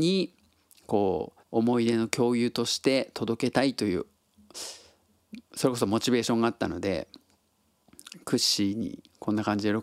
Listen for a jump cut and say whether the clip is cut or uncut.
cut